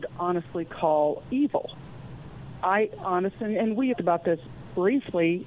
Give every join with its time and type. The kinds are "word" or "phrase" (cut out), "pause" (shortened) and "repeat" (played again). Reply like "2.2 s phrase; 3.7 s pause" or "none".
3.9 s phrase